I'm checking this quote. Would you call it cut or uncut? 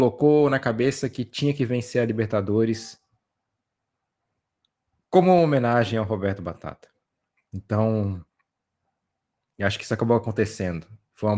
uncut